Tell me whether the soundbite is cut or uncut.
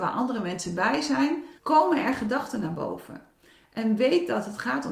cut